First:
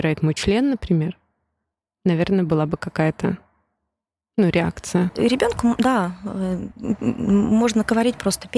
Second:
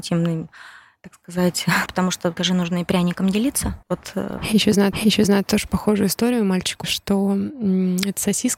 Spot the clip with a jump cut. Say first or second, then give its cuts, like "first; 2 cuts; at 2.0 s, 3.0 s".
second; 5 cuts; at 1.9 s, 2.4 s, 3.8 s, 4.9 s, 6.8 s